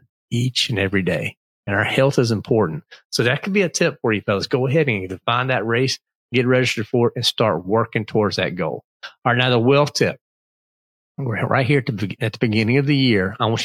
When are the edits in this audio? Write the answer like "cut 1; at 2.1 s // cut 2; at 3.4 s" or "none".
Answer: none